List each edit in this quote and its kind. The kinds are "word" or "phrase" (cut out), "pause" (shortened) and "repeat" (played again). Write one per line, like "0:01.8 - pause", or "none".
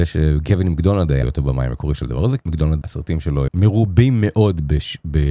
0:01.2 - word
0:02.4 - word
0:02.8 - word
0:03.5 - phrase